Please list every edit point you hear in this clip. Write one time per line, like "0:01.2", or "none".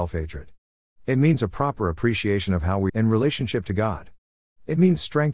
0:02.9